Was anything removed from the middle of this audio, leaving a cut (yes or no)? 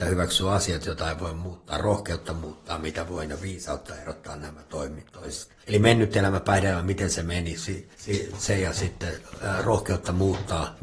yes